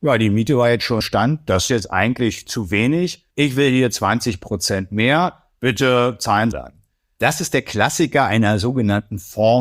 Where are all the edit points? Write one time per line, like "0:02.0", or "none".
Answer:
0:01.0
0:01.7
0:03.3
0:06.5